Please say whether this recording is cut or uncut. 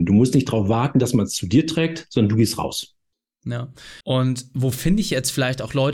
cut